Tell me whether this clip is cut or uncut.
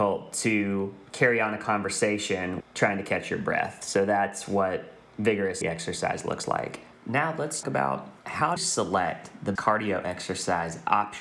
cut